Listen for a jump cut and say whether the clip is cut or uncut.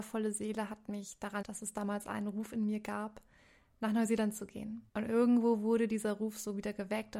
cut